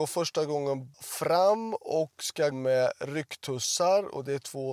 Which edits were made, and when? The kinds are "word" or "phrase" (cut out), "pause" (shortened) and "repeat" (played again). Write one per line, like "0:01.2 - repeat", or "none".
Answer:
0:00.9 - word
0:02.5 - word

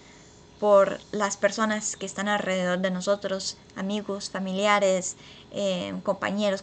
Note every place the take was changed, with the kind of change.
none

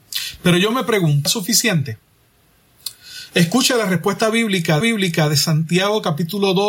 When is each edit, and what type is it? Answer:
0:01.3 - word
0:04.8 - repeat

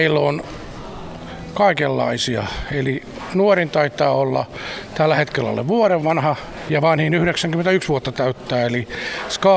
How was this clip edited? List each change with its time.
none

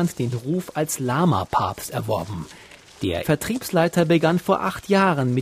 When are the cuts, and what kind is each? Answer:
0:03.2 - word

